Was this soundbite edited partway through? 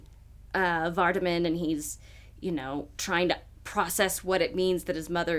no; 0 cuts

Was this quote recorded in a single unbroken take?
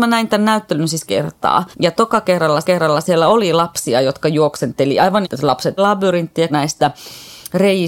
no; 6 cuts; at 1.0 s, 1.7 s, 2.6 s, 5.2 s, 5.8 s, 6.5 s

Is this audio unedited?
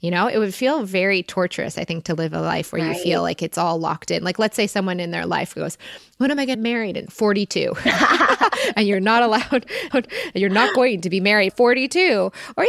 no; 4 cuts; at 6.5 s, 7.1 s, 9.9 s, 11.5 s

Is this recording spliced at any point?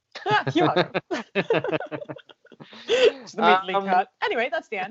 no; 0 cuts

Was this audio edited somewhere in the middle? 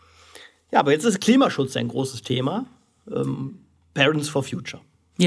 no; 0 cuts

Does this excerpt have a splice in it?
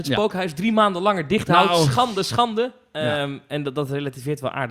no; 0 cuts

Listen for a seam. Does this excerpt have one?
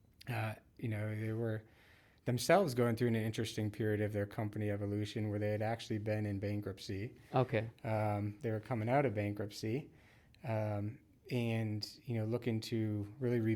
no; 0 cuts

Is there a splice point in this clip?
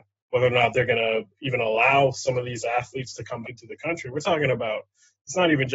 yes; 1 cut; at 3.4 s

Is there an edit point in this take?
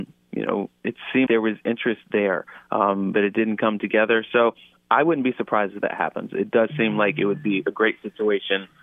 yes; 1 cut; at 1.3 s

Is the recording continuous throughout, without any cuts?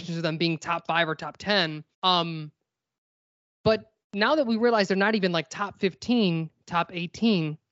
no; 2 cuts; at 1.9 s, 4.0 s

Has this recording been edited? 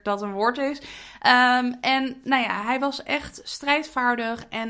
no; 0 cuts

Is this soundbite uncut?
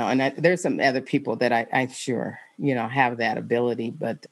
yes; 0 cuts

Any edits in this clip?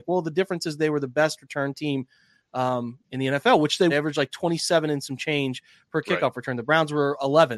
yes; 1 cut; at 3.9 s

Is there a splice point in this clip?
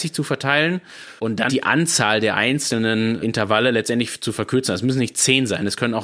yes; 3 cuts; at 1.2 s, 1.5 s, 3.2 s

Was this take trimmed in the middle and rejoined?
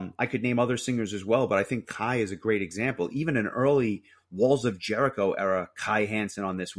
no; 0 cuts

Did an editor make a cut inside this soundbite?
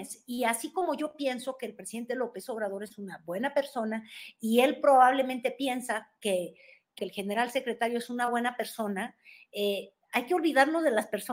yes; 1 cut; at 7.0 s

